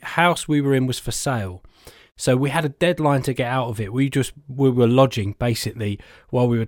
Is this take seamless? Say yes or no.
yes